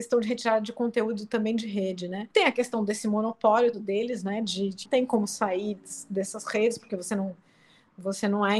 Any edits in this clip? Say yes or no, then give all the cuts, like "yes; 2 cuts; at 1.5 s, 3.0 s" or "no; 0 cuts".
yes; 4 cuts; at 2.3 s, 3.7 s, 4.8 s, 5.8 s